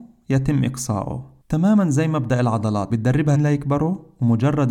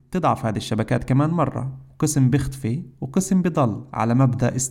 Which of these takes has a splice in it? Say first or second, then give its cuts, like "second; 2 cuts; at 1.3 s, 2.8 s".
first; 3 cuts; at 1.4 s, 2.9 s, 3.3 s